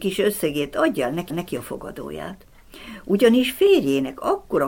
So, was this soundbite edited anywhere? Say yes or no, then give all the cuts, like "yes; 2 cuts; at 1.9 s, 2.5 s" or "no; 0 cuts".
yes; 1 cut; at 1.3 s